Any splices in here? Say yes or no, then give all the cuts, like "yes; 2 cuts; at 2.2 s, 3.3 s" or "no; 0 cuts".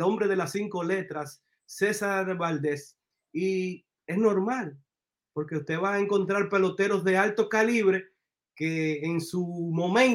no; 0 cuts